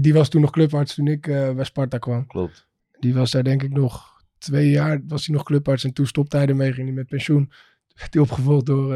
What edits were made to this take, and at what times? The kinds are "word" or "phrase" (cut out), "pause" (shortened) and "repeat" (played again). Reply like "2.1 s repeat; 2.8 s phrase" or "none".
none